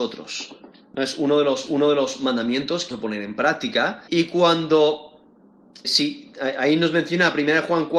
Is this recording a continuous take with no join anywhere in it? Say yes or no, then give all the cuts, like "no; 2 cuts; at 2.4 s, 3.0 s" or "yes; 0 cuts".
no; 4 cuts; at 1.7 s, 2.9 s, 4.1 s, 5.8 s